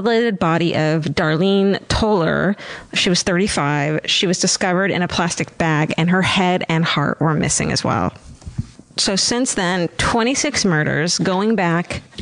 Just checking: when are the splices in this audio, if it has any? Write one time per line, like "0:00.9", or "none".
0:08.8